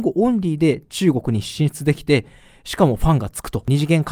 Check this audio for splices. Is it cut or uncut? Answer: uncut